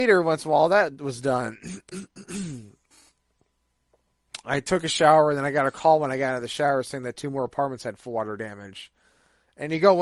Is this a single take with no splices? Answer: yes; 0 cuts

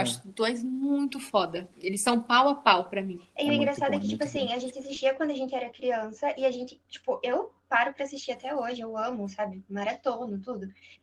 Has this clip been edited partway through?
yes; 1 cut; at 1.7 s

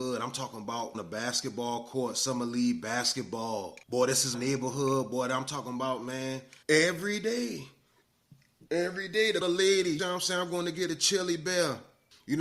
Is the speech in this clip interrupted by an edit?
yes; 7 cuts; at 0.9 s, 3.8 s, 4.3 s, 6.6 s, 8.7 s, 9.4 s, 10.0 s

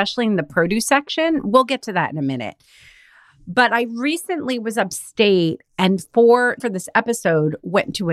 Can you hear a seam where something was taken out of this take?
yes; 1 cut; at 6.6 s

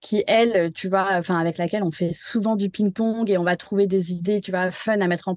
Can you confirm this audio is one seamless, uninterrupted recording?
yes; 0 cuts

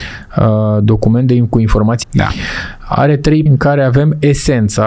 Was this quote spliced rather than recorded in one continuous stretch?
yes; 2 cuts; at 2.0 s, 3.5 s

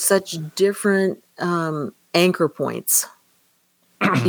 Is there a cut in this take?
no; 0 cuts

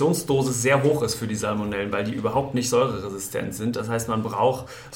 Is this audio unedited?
yes; 0 cuts

